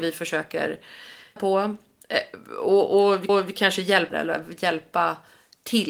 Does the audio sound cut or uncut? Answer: cut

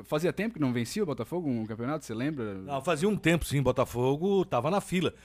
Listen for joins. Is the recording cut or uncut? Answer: cut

